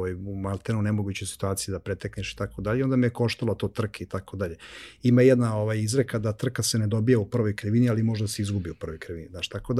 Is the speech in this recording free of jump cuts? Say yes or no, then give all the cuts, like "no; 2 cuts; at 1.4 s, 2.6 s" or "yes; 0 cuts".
yes; 0 cuts